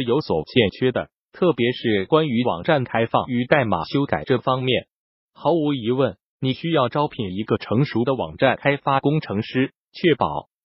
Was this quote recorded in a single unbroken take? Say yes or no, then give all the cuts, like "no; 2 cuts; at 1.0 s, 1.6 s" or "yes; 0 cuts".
yes; 0 cuts